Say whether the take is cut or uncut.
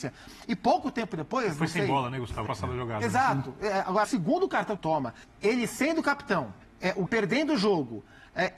cut